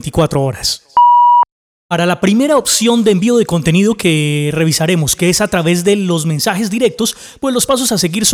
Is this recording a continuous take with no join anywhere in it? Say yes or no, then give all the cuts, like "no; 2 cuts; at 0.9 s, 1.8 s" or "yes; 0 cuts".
yes; 0 cuts